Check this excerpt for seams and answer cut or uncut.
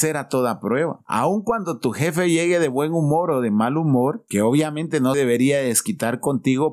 cut